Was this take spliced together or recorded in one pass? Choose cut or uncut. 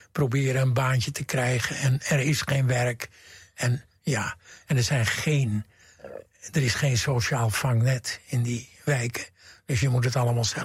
uncut